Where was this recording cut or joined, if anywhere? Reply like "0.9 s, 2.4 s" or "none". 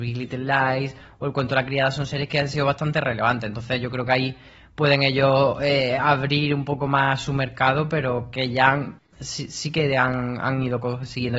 none